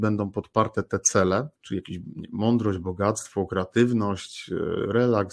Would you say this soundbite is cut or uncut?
cut